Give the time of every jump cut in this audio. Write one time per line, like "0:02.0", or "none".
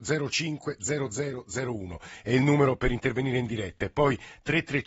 none